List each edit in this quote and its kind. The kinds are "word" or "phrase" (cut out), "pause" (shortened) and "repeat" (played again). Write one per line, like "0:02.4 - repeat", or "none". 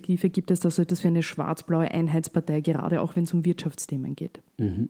none